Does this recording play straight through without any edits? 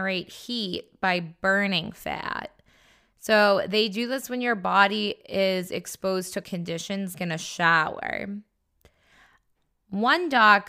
no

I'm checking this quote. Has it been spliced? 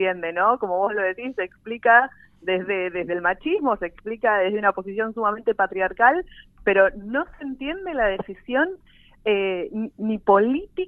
no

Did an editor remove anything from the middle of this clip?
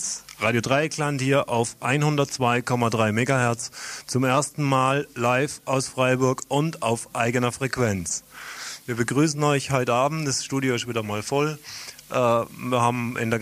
no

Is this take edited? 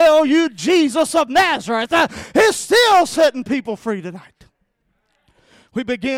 no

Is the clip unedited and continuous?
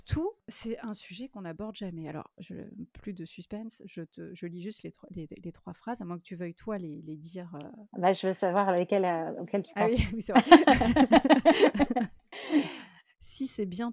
yes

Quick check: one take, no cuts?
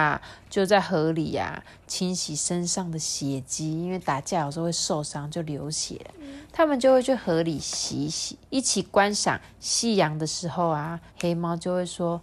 no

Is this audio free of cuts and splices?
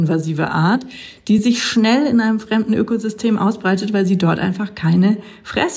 yes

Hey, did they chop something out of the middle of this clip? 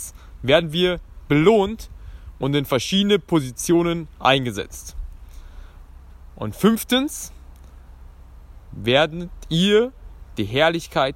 no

